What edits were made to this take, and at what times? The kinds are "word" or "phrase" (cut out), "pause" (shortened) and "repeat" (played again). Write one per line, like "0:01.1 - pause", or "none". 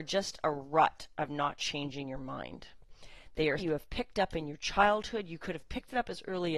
0:03.6 - word